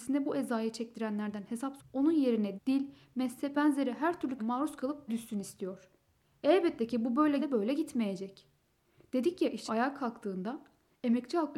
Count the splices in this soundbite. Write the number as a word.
seven